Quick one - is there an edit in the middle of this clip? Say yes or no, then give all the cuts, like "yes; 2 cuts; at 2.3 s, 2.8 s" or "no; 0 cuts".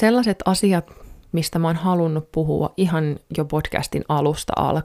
yes; 1 cut; at 1.3 s